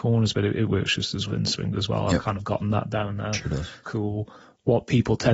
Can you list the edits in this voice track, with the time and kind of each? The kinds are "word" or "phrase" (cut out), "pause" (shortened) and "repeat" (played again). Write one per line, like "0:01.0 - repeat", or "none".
0:01.3 - word
0:03.8 - phrase